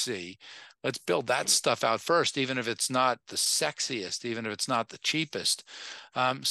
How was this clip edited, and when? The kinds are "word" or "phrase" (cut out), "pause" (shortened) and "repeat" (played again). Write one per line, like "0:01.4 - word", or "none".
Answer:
none